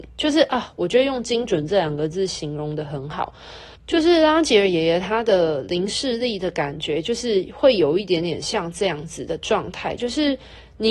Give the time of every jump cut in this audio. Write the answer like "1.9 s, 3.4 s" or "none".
3.8 s